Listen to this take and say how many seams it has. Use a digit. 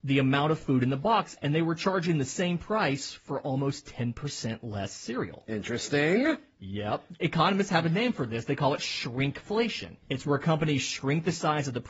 1